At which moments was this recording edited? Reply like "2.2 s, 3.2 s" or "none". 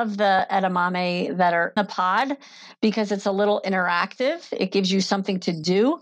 1.8 s